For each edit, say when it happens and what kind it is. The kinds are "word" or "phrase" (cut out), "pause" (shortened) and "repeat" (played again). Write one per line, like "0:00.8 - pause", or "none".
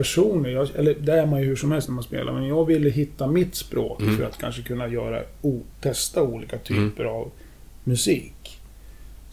none